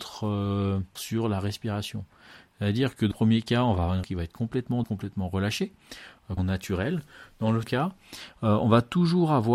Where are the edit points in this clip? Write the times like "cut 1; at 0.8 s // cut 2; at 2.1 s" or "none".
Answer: cut 1; at 1.0 s // cut 2; at 3.1 s // cut 3; at 4.0 s // cut 4; at 4.8 s // cut 5; at 6.4 s // cut 6; at 7.6 s